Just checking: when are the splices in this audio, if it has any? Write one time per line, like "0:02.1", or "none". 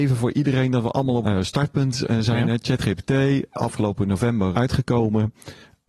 0:01.2
0:04.5